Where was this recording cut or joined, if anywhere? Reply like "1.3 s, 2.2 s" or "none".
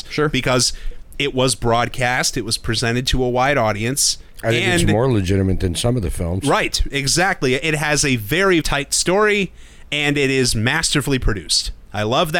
8.6 s